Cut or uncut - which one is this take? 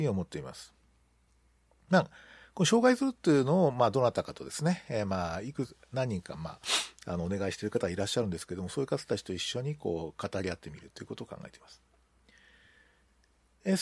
uncut